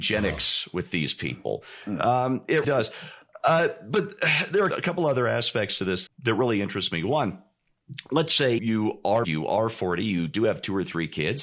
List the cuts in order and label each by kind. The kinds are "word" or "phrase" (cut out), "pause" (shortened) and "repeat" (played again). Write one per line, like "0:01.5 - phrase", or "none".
0:02.6 - word
0:04.7 - phrase
0:06.1 - word
0:08.6 - word
0:09.2 - word